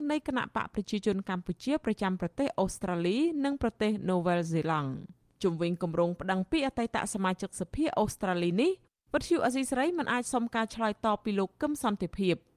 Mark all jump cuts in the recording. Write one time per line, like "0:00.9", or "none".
none